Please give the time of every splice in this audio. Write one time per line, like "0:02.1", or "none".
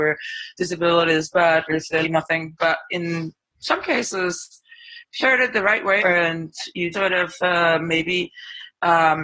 0:01.7
0:02.0
0:05.2
0:06.0
0:06.9